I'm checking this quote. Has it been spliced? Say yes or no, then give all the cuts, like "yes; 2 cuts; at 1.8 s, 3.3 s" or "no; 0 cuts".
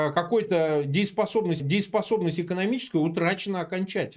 yes; 1 cut; at 1.6 s